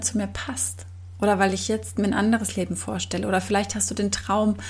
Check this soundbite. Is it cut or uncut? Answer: uncut